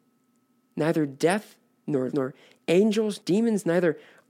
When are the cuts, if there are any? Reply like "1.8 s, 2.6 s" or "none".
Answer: 2.1 s, 3.2 s